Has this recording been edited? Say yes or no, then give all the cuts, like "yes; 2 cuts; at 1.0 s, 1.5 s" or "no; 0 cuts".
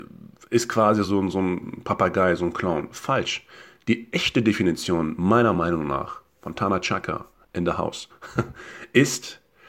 no; 0 cuts